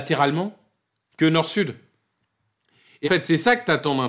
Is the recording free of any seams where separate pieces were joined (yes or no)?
no